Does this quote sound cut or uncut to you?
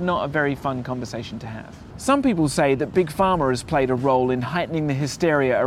uncut